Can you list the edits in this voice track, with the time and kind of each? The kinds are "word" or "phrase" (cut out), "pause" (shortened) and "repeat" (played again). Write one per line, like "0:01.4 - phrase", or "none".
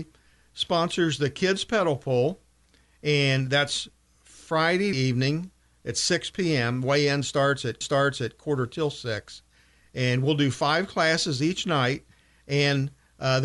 0:04.9 - phrase
0:07.8 - repeat